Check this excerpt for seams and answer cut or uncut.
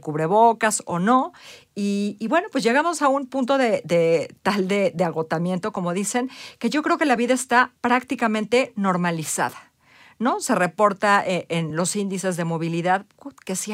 uncut